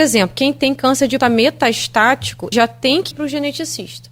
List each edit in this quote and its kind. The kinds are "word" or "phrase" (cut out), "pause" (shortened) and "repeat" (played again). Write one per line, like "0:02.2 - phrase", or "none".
0:01.2 - word
0:02.5 - word
0:03.1 - word